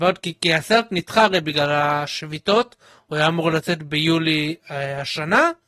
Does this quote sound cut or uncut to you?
uncut